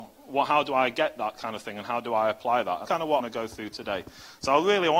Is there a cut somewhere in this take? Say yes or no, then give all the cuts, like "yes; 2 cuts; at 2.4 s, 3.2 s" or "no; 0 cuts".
yes; 2 cuts; at 2.8 s, 3.2 s